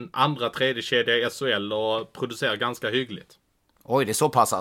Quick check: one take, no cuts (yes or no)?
yes